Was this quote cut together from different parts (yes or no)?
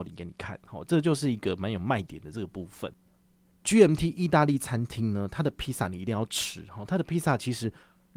no